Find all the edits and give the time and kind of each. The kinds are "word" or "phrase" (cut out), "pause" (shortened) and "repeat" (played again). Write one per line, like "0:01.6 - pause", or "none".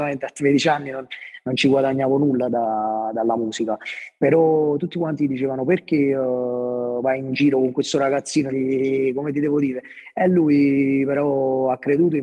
0:08.5 - word